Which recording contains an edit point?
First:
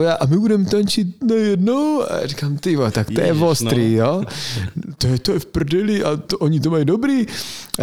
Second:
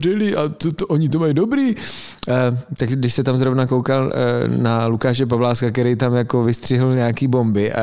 first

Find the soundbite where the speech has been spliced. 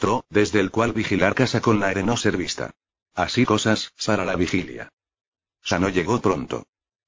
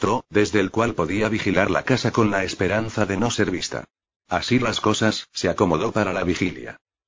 first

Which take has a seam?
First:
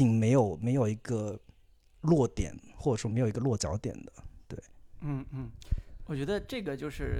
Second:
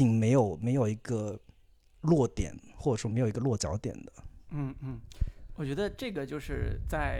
second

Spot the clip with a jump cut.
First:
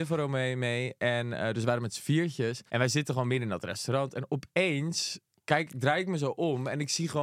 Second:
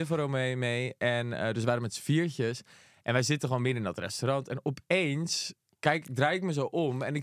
first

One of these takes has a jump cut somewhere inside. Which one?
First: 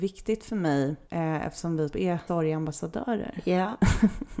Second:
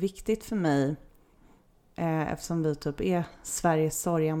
first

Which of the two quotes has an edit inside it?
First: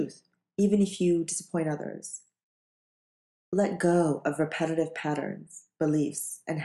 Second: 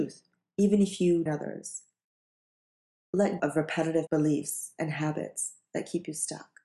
second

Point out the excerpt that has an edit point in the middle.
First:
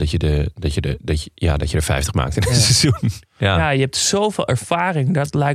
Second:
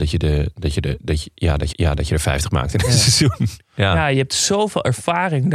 second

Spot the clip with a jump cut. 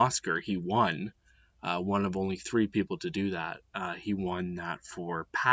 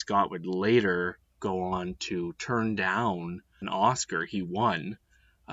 second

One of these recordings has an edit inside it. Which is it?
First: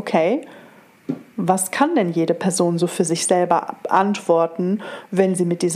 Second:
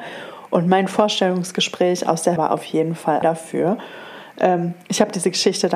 second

